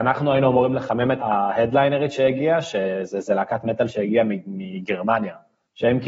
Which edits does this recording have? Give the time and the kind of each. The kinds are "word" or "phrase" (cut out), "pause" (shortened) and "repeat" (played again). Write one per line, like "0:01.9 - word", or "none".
0:01.2 - word